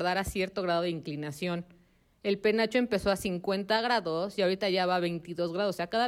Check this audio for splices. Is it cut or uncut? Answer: uncut